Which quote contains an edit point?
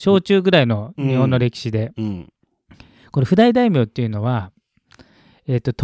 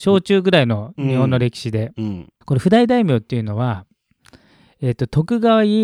second; 1 cut; at 2.4 s

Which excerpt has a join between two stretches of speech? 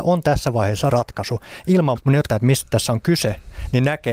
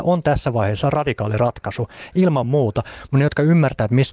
first; 3 cuts; at 0.9 s, 2.0 s, 2.3 s

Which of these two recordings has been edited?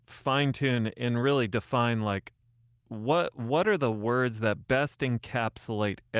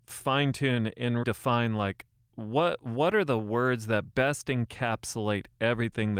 second; 2 cuts; at 1.2 s, 2.2 s

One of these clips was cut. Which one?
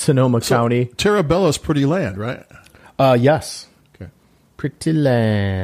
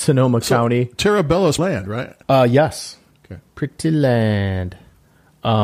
second; 3 cuts; at 1.6 s, 2.2 s, 3.5 s

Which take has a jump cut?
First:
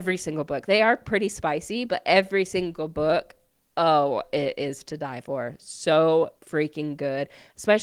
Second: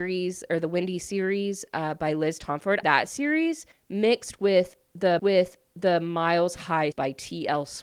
second; 5 cuts; at 1.0 s, 2.8 s, 3.7 s, 5.2 s, 6.9 s

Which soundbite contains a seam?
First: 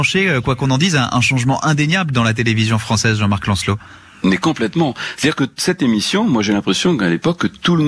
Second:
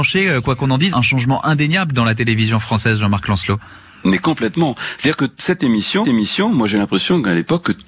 second; 2 cuts; at 0.9 s, 6.0 s

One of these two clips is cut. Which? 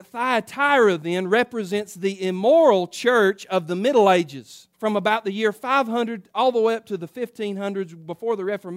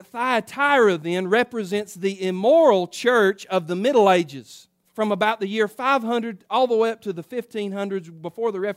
first; 1 cut; at 4.7 s

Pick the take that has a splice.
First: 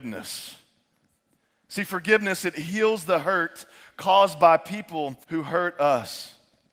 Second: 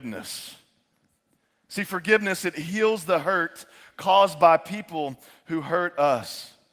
first; 1 cut; at 5.2 s

